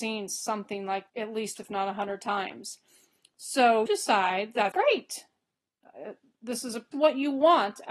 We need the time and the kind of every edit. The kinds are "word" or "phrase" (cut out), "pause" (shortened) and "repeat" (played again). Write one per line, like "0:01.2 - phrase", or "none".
0:01.1 - word
0:01.6 - word
0:03.9 - word
0:04.7 - word
0:06.9 - word